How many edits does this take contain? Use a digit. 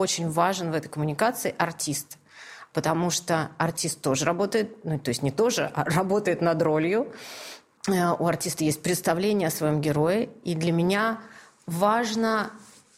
1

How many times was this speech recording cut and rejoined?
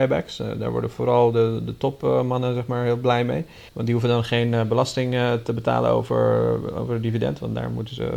1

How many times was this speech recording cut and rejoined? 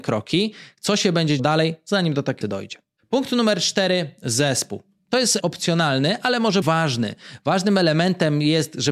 4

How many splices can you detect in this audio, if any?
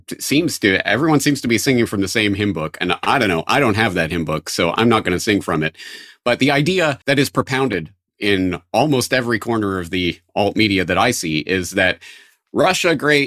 1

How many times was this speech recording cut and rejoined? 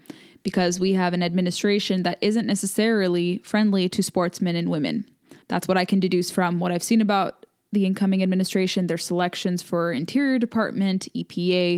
1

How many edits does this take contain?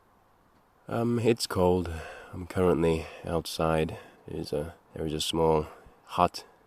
3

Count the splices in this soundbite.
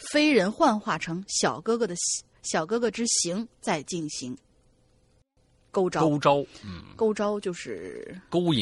0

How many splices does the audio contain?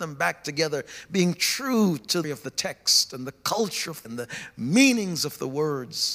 2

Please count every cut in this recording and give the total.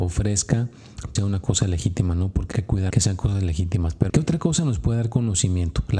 4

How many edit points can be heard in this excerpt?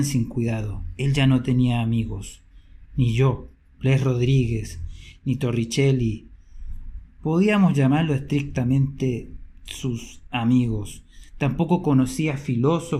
0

